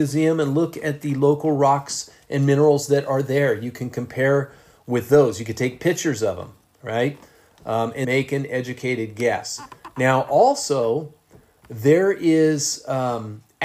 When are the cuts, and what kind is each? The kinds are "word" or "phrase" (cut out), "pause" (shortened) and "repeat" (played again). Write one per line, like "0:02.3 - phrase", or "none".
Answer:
0:08.0 - word